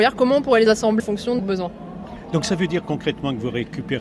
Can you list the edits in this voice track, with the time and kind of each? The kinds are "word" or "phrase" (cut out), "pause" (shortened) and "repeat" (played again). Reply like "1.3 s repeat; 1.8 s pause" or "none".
1.0 s word; 1.4 s word

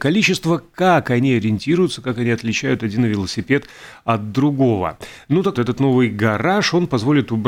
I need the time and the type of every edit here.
5.5 s word

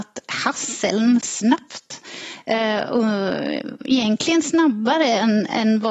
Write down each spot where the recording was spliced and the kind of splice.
1.2 s phrase

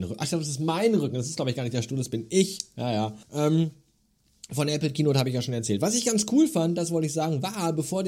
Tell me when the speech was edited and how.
3.2 s pause

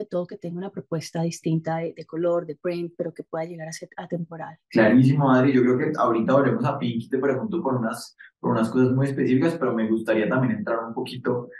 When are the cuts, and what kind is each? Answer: none

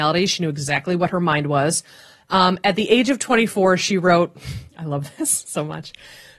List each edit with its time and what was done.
none

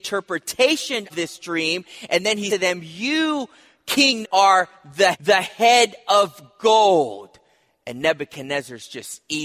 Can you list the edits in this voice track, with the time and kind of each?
1.1 s word; 2.5 s word; 4.2 s word; 5.1 s word

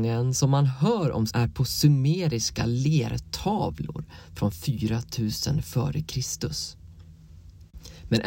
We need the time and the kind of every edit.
1.3 s word

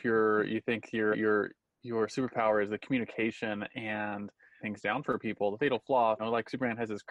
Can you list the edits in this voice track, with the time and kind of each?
1.1 s word; 4.6 s phrase; 6.2 s word

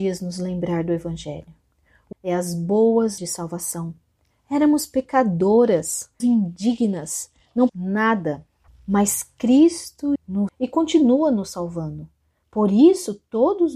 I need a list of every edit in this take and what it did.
2.1 s word; 3.2 s word; 6.2 s word; 7.7 s word; 10.2 s word; 10.5 s word

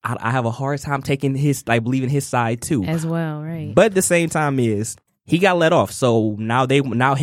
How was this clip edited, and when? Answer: 5.1 s pause

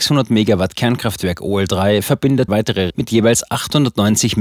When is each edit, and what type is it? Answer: 2.5 s word; 2.9 s word

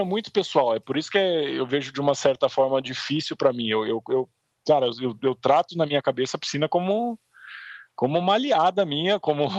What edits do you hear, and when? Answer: none

